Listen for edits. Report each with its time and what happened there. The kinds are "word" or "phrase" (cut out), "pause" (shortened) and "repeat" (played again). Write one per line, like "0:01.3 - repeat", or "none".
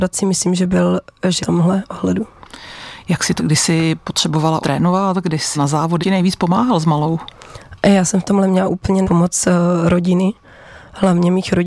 0:01.4 - phrase
0:03.4 - phrase
0:04.6 - word
0:05.5 - word
0:06.0 - word
0:09.0 - word

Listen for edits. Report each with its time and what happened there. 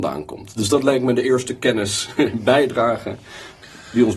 none

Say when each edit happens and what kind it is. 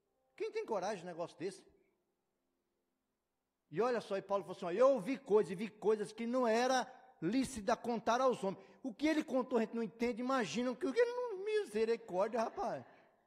none

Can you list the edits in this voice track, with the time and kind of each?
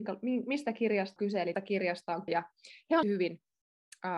0:01.2 - word
0:01.5 - word
0:02.3 - word
0:03.0 - phrase

